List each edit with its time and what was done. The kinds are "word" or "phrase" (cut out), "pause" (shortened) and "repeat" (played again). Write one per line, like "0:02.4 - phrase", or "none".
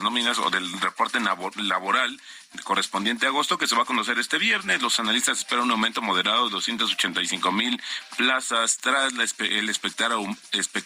none